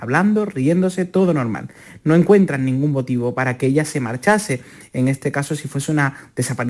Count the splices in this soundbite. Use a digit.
0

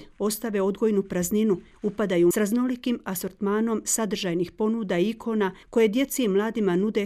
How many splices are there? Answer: 2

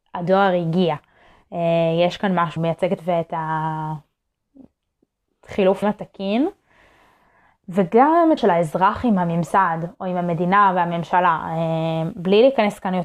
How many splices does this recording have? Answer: 4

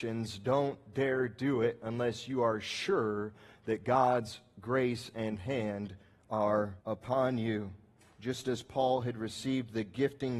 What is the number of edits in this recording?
1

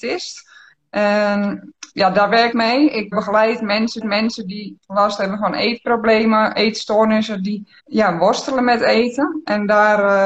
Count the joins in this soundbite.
4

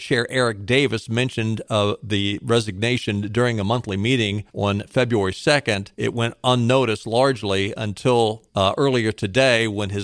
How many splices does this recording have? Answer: 3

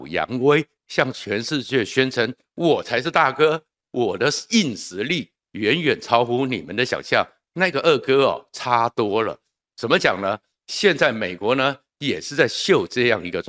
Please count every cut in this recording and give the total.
0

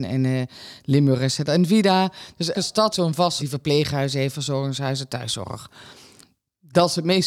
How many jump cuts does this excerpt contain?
3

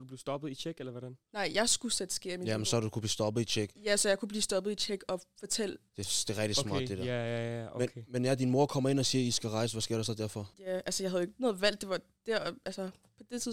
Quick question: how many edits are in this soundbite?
3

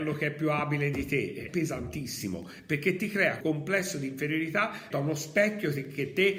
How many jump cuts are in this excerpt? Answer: 3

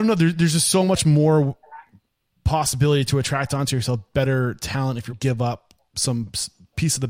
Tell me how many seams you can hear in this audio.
1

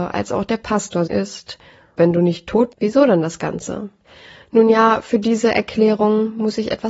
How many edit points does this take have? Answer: 4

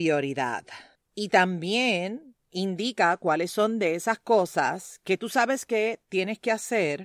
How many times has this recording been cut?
1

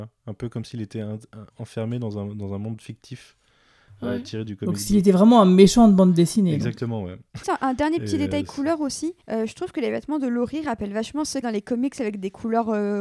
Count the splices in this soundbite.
4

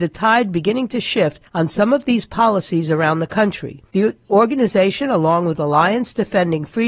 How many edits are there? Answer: 2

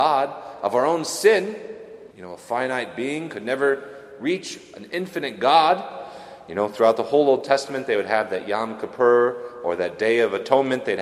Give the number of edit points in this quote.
1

